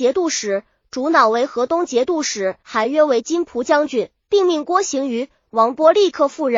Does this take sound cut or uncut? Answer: cut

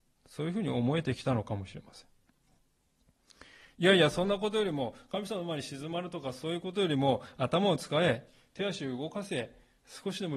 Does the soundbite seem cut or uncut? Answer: uncut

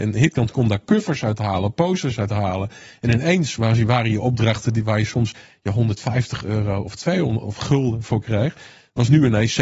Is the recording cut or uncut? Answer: uncut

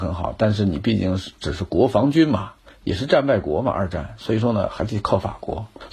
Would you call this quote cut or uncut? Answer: uncut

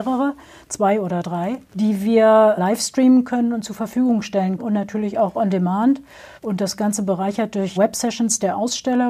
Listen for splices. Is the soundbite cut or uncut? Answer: cut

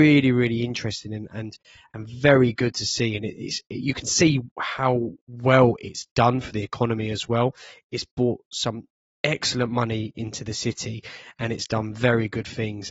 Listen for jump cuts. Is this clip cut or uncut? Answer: cut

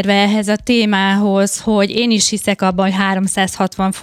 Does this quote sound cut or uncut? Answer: uncut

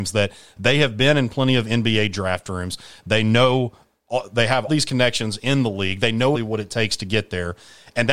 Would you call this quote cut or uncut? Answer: cut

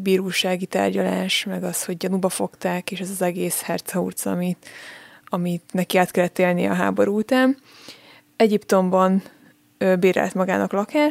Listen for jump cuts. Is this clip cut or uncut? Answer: uncut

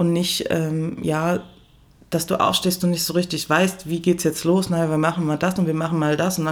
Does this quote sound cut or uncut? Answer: uncut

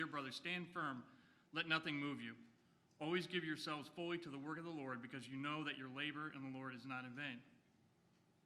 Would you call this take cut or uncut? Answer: uncut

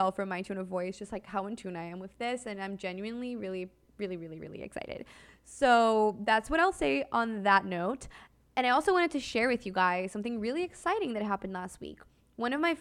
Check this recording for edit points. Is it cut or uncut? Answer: uncut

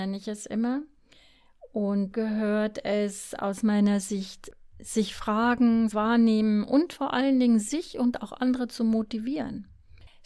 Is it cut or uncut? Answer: cut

